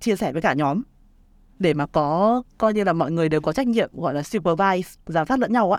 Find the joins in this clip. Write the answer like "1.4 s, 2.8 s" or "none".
none